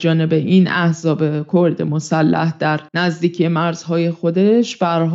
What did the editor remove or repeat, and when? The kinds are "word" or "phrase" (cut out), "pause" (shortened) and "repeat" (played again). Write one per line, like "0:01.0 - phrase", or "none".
0:02.9 - pause